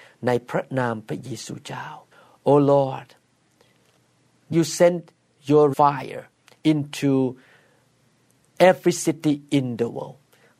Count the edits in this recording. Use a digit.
3